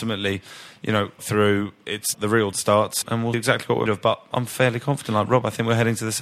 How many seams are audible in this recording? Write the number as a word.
seven